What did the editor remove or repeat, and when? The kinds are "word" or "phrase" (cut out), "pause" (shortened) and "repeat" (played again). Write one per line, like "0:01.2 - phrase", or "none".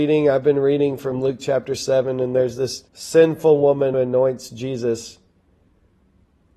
0:02.9 - pause
0:03.9 - word